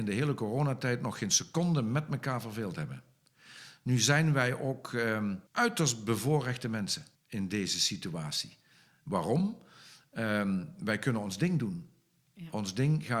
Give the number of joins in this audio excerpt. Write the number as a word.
two